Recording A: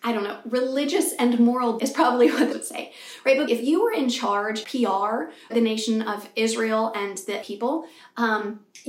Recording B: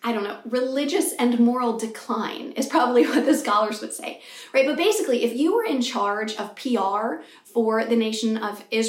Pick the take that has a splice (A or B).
A